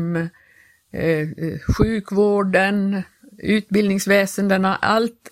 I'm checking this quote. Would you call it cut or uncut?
uncut